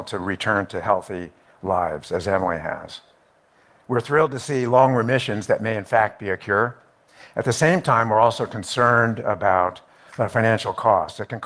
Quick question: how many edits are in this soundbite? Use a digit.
0